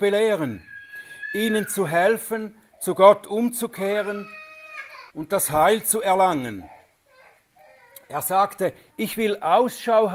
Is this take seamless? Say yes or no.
no